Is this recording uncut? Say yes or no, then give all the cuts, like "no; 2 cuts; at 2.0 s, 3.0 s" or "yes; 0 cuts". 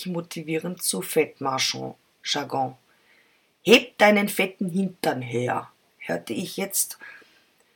yes; 0 cuts